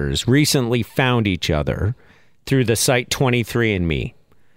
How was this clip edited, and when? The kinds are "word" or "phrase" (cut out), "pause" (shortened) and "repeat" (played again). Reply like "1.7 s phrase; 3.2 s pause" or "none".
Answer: none